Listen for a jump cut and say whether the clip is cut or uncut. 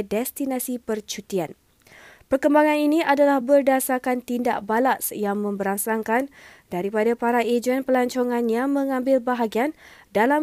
uncut